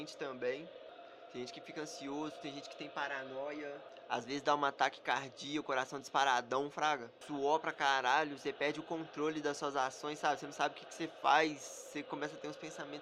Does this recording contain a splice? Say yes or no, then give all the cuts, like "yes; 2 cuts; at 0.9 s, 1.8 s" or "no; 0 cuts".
no; 0 cuts